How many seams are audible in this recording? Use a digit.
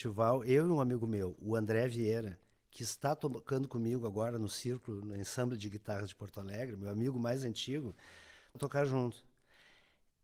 1